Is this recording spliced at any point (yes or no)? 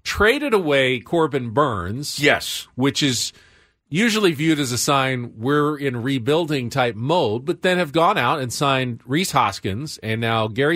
no